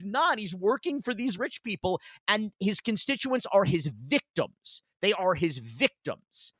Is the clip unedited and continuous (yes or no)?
yes